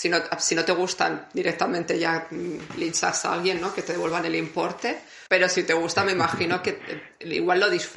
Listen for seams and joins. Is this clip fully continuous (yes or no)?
no